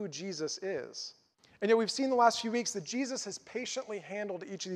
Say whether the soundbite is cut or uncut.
cut